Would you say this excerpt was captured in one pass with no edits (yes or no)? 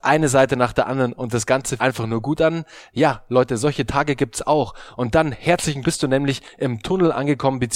no